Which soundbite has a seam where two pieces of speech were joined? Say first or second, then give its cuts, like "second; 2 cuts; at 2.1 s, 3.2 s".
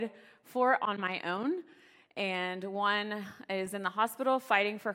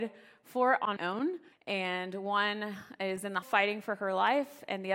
second; 3 cuts; at 1.0 s, 1.5 s, 3.4 s